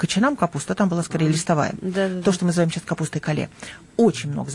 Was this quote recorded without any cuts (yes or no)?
yes